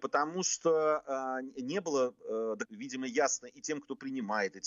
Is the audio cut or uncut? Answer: cut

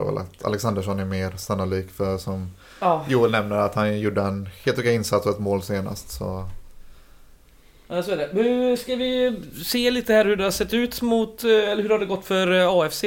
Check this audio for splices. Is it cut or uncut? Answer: uncut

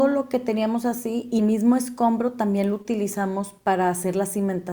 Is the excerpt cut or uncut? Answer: cut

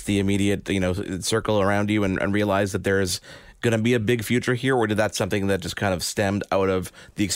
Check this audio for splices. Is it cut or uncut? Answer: uncut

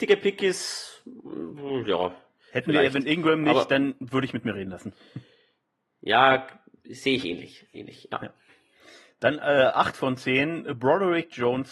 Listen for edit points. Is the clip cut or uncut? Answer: uncut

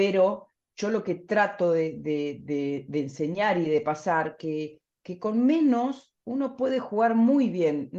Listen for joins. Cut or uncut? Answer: uncut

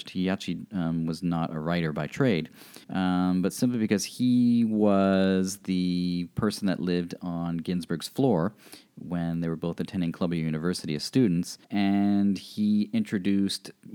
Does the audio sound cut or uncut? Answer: cut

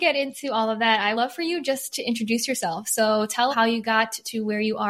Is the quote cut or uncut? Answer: cut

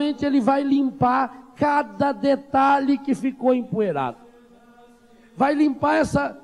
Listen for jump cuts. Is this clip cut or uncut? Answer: uncut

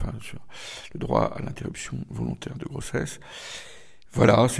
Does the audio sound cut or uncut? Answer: uncut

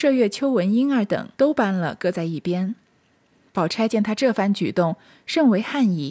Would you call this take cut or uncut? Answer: cut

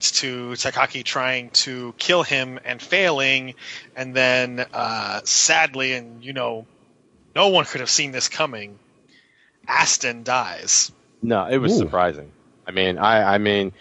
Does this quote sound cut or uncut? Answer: uncut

